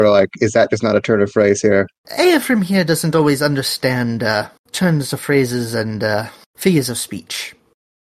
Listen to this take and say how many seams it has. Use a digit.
1